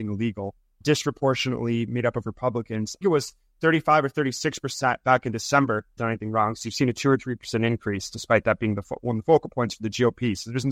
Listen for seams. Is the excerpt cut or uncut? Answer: cut